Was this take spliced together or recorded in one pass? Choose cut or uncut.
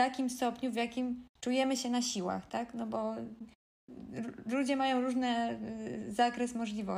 cut